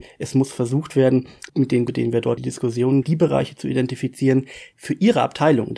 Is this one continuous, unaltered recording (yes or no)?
no